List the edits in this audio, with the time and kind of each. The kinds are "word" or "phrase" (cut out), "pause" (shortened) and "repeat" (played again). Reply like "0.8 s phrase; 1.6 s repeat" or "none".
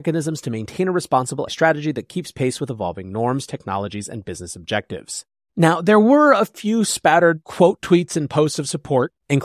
1.5 s word